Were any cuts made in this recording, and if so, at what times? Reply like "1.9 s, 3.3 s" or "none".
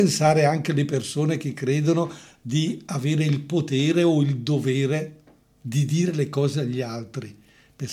none